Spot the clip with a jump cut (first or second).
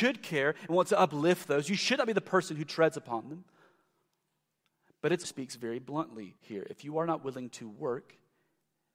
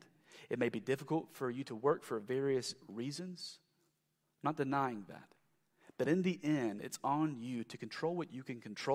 first